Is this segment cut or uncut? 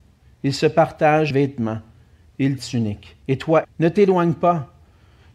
cut